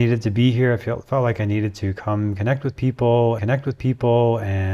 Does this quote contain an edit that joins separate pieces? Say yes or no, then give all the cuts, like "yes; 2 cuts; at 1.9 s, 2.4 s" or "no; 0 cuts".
yes; 1 cut; at 3.4 s